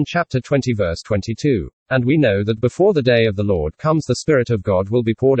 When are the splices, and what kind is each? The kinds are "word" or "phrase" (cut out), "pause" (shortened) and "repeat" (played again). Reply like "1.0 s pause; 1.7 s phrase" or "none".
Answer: 1.8 s pause